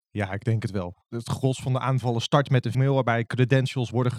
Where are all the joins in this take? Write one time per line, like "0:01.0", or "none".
0:02.7